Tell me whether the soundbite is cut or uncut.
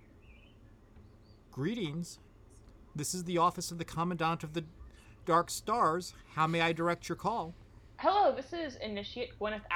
uncut